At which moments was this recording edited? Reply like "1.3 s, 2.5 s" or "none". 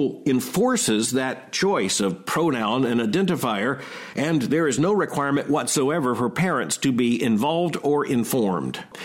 none